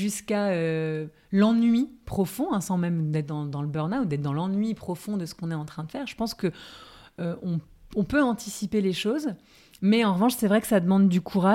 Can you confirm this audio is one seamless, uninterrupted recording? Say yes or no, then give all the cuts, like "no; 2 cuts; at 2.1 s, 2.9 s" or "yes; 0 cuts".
yes; 0 cuts